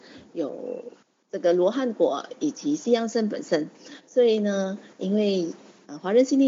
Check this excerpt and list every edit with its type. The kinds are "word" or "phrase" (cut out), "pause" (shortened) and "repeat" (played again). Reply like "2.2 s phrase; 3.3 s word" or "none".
1.0 s pause